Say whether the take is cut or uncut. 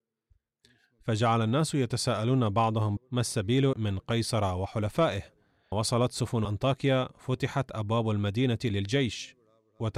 cut